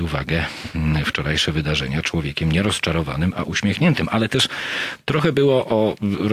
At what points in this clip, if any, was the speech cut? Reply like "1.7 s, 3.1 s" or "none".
none